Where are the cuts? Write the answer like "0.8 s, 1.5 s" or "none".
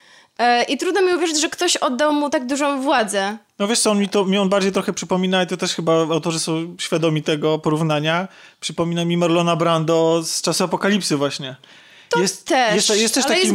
none